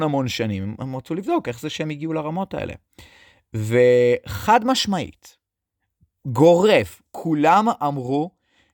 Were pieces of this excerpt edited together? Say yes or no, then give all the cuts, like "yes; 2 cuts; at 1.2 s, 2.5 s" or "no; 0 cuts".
no; 0 cuts